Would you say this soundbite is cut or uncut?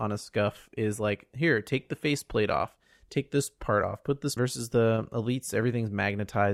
cut